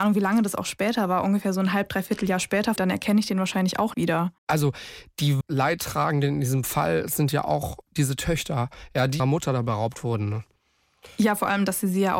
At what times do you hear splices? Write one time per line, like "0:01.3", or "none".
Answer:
0:02.8
0:03.9
0:04.4
0:05.4
0:07.8
0:09.2